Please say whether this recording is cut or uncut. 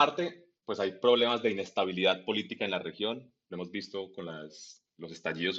uncut